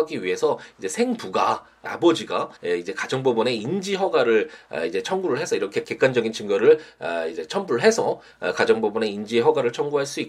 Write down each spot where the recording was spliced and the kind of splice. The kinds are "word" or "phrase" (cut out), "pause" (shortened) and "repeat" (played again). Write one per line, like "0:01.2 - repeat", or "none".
0:01.9 - word
0:02.6 - pause
0:05.8 - word